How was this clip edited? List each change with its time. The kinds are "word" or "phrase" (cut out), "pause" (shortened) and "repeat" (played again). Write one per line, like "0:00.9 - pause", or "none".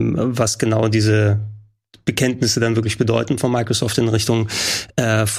none